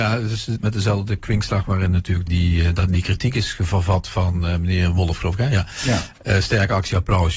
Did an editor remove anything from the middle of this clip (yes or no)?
yes